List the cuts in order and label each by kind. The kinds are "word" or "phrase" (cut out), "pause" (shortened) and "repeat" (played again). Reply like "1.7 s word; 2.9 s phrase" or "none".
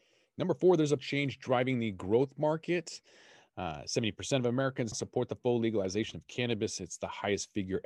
1.0 s word; 4.9 s word